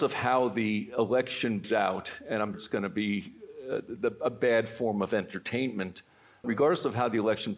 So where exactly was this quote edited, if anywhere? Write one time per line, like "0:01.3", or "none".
0:01.6
0:02.5
0:06.4